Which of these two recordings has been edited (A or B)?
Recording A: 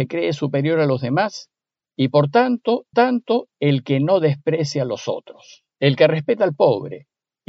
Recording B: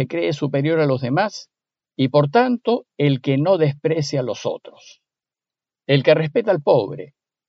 A